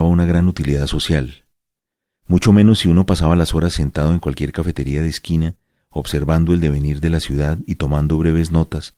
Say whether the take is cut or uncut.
uncut